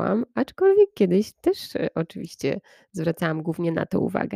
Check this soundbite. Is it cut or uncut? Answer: uncut